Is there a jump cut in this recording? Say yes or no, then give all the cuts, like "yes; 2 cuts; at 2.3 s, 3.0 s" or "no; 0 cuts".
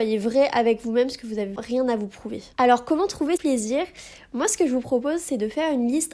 yes; 3 cuts; at 1.6 s, 2.5 s, 3.4 s